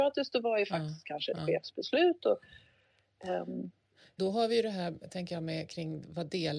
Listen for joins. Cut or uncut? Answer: cut